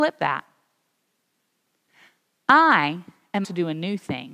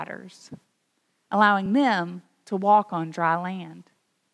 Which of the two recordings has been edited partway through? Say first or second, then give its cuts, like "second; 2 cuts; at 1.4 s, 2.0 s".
first; 1 cut; at 3.4 s